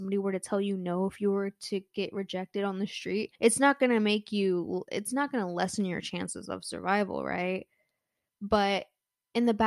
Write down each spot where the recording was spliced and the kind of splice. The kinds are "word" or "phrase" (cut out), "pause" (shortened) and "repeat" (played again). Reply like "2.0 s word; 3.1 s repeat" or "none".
3.4 s pause